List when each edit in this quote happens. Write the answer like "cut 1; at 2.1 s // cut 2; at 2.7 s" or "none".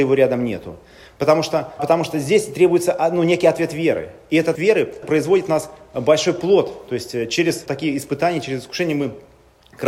cut 1; at 1.8 s // cut 2; at 4.6 s // cut 3; at 5.0 s // cut 4; at 7.7 s